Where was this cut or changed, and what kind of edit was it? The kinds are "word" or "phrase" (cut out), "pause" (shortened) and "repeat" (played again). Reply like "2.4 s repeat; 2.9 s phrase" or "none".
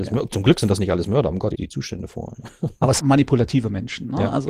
1.5 s word; 3.0 s phrase

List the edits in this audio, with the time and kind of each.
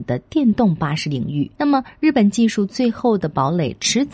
1.5 s pause

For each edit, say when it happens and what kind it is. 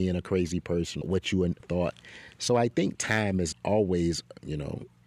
1.0 s phrase; 1.6 s word; 3.5 s word

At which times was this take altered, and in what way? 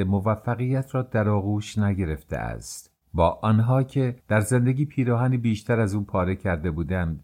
3.0 s pause; 4.2 s pause

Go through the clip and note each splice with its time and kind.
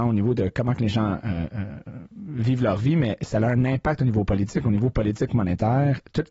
none

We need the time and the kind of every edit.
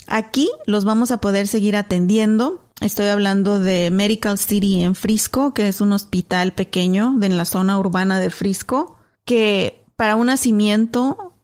none

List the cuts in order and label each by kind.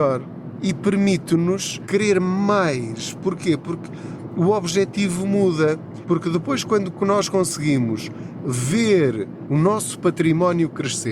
none

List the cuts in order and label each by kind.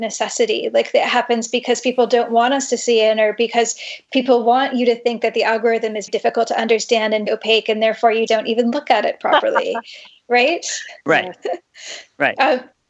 6.1 s word; 7.3 s word; 8.3 s word

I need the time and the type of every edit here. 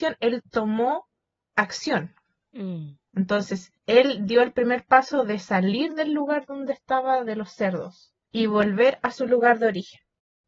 3.8 s pause; 8.3 s pause

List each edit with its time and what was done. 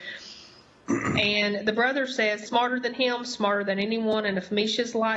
2.5 s phrase

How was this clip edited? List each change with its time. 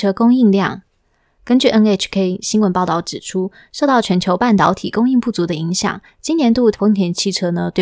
6.7 s word

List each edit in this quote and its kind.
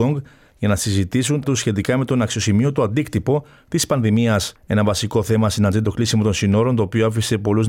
1.4 s word; 4.6 s pause; 5.8 s word

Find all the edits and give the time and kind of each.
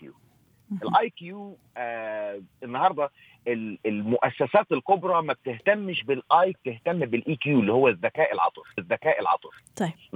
6.5 s phrase; 8.8 s repeat

